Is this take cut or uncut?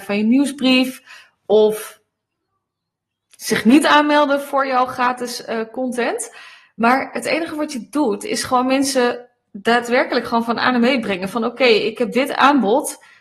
uncut